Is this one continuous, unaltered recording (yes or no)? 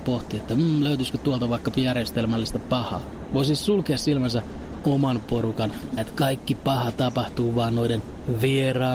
no